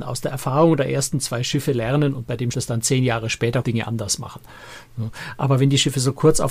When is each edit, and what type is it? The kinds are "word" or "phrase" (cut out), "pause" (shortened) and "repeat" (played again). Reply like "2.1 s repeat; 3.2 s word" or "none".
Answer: 2.5 s word; 3.6 s word